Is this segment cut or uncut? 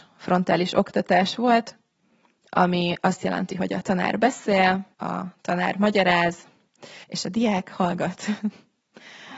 cut